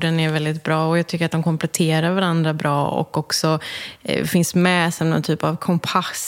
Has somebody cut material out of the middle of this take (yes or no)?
no